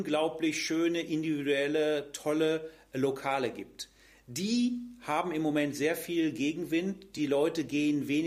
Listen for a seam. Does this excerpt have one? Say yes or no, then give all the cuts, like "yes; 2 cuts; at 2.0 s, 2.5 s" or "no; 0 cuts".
no; 0 cuts